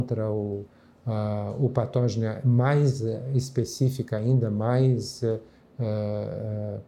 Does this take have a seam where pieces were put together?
no; 0 cuts

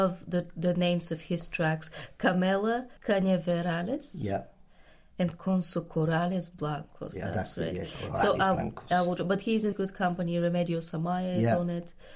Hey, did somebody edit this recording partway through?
yes; 2 cuts; at 3.0 s, 9.7 s

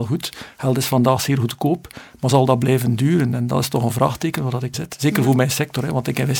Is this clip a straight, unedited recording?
no; 1 cut; at 4.7 s

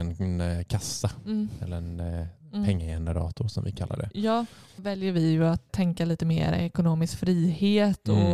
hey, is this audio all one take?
no; 2 cuts; at 4.8 s, 5.7 s

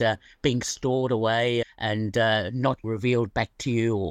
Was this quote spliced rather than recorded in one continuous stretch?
yes; 2 cuts; at 1.6 s, 2.8 s

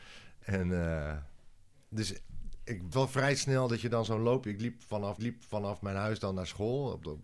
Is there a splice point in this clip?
yes; 2 cuts; at 2.9 s, 5.2 s

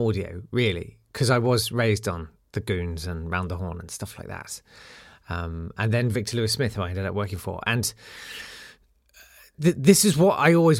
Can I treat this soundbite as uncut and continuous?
yes; 0 cuts

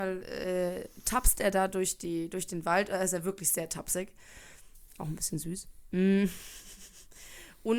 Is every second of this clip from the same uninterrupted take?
yes; 0 cuts

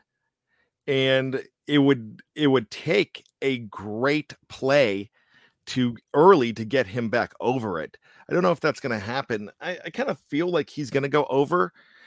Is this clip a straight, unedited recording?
yes; 0 cuts

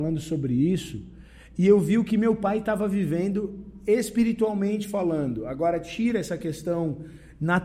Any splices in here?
no; 0 cuts

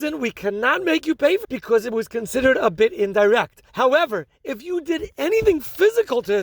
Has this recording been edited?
yes; 2 cuts; at 1.4 s, 3.7 s

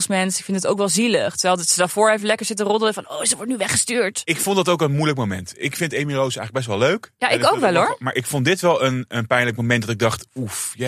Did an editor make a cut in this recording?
no; 0 cuts

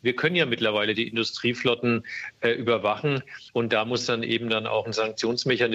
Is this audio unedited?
no; 1 cut; at 3.5 s

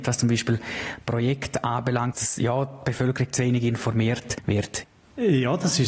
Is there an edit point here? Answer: yes; 1 cut; at 2.1 s

